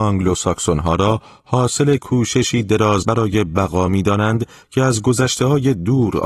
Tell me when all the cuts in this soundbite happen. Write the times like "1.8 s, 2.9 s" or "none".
3.0 s